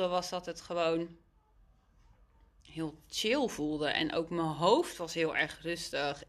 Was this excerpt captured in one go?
yes; 0 cuts

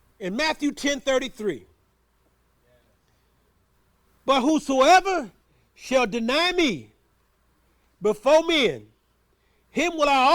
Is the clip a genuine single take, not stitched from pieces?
yes; 0 cuts

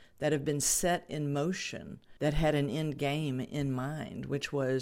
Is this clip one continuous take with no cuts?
no; 1 cut; at 2.2 s

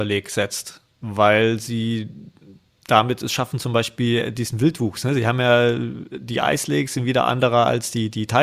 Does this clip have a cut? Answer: no; 0 cuts

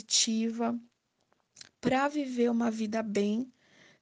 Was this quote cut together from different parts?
no; 0 cuts

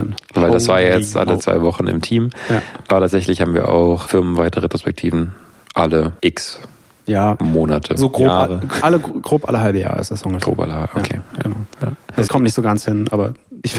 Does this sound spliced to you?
yes; 4 cuts; at 1.4 s, 4.1 s, 6.2 s, 12.3 s

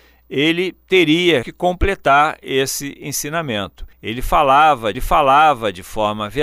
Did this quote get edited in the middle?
yes; 3 cuts; at 1.4 s, 3.9 s, 4.9 s

